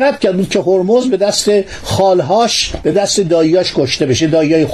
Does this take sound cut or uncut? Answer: uncut